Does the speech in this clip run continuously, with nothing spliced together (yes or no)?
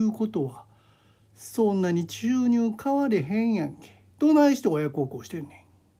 no